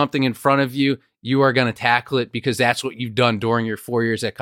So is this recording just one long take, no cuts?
yes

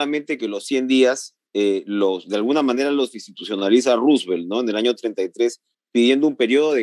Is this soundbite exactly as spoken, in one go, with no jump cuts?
yes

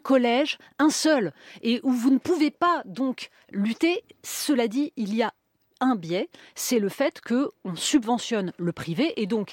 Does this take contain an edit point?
no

